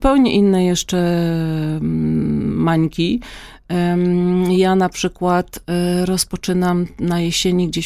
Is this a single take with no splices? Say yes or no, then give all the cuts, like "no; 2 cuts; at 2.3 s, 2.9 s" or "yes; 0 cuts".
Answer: yes; 0 cuts